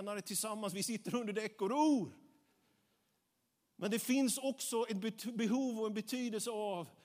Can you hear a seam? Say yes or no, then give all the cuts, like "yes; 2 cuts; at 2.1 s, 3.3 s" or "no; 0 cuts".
no; 0 cuts